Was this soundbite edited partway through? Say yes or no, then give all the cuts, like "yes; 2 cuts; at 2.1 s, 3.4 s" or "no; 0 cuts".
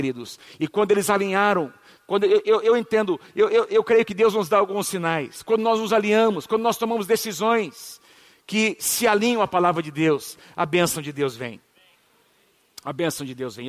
no; 0 cuts